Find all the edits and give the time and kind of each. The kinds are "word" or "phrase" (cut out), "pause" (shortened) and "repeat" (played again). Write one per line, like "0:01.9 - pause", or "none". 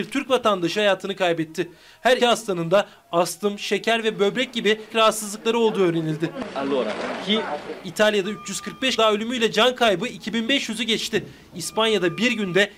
0:02.2 - word
0:04.9 - word
0:09.0 - word